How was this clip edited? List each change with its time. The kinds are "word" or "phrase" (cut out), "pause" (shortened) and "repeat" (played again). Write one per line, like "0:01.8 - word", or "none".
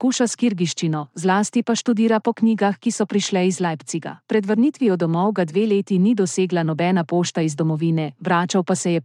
0:04.2 - pause